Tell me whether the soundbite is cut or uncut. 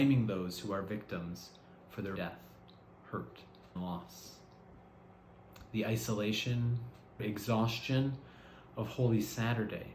cut